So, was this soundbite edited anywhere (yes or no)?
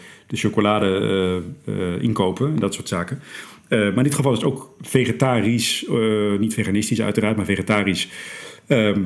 no